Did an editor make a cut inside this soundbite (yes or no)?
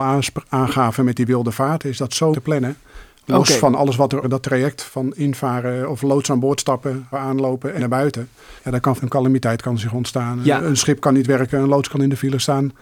yes